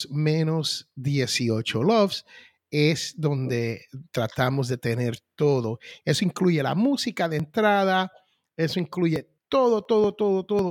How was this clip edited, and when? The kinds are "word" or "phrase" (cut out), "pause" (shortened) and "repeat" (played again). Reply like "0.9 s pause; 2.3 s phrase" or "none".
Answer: 9.4 s pause